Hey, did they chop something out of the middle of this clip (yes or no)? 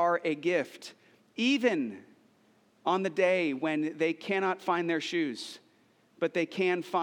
no